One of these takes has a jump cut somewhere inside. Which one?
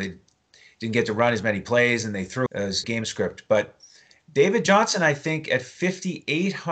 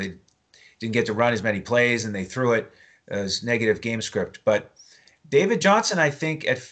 first; 2 cuts; at 2.5 s, 2.8 s

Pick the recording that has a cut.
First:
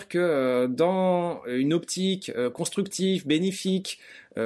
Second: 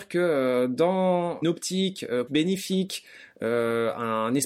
second; 2 cuts; at 1.4 s, 2.3 s

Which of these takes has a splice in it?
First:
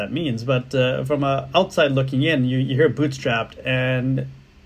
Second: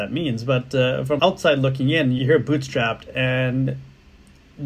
second; 2 cuts; at 1.2 s, 2.2 s

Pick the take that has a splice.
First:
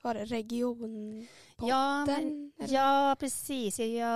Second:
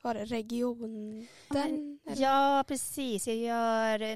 second; 1 cut; at 1.5 s

